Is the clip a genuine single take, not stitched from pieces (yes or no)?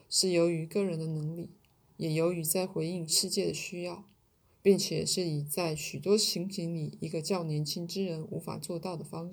yes